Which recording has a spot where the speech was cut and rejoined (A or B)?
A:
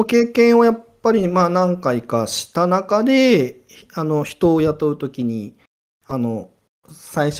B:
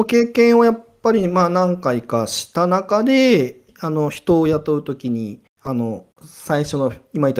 B